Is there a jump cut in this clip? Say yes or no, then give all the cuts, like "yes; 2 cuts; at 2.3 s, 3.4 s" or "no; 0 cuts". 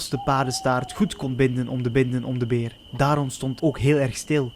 yes; 2 cuts; at 1.9 s, 3.6 s